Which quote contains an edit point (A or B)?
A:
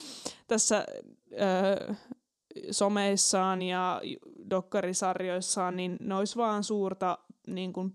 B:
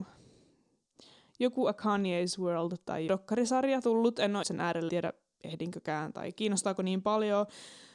B